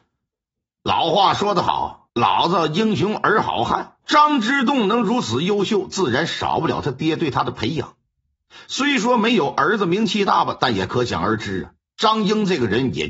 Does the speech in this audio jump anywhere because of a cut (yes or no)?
yes